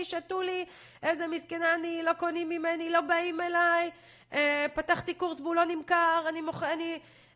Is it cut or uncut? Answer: uncut